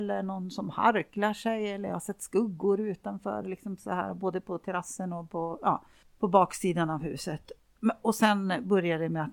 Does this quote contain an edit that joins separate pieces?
no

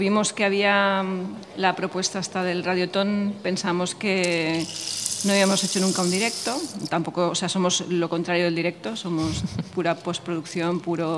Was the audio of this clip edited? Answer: no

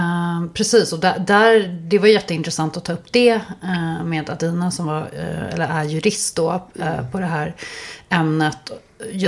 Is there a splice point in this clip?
no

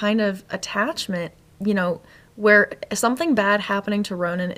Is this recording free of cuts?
yes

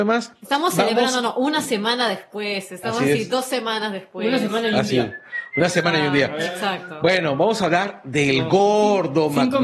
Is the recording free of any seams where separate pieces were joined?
yes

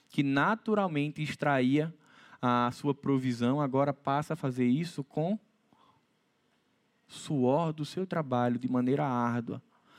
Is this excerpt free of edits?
yes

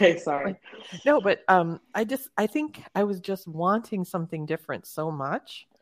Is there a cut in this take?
no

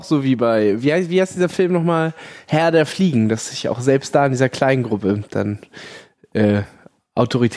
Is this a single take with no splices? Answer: yes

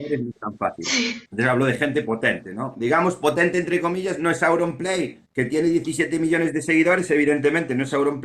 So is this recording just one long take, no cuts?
no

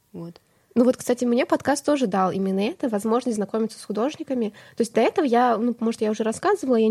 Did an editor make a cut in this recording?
no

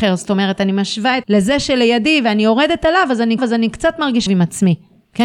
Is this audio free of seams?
no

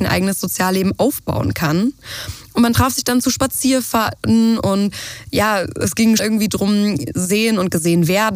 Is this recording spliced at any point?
yes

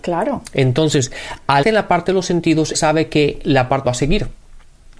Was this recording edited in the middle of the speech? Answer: yes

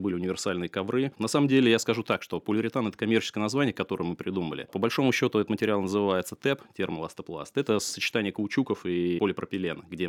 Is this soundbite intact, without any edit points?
yes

